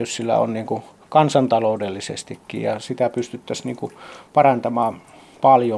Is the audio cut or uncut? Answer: uncut